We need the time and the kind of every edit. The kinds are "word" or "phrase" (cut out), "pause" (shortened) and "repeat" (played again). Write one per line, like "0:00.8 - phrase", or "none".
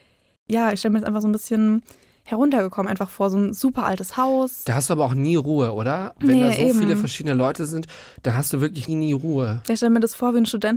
0:08.9 - word